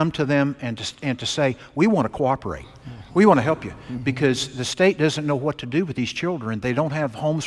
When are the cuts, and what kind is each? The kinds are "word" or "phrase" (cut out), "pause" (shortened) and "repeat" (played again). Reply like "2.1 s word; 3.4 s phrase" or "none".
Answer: none

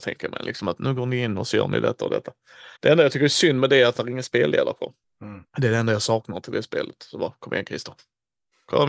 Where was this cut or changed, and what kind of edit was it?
2.8 s pause; 5.5 s pause

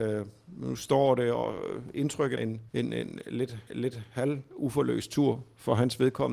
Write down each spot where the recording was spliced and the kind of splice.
2.4 s word; 2.7 s pause; 3.7 s repeat

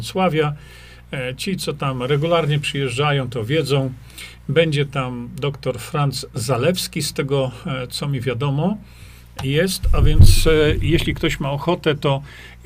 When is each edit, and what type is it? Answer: none

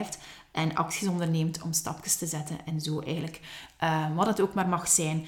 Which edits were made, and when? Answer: none

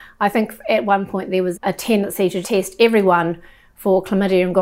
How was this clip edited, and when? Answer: 1.5 s word; 2.4 s word

